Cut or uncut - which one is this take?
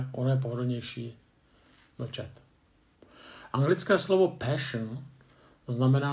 uncut